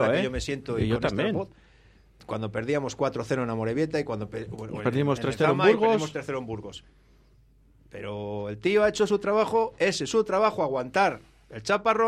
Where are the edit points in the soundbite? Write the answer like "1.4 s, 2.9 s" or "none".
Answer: none

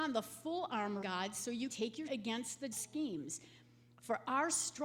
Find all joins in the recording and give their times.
1.0 s, 1.7 s, 2.1 s, 2.7 s

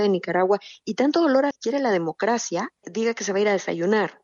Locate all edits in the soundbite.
1.5 s, 2.8 s

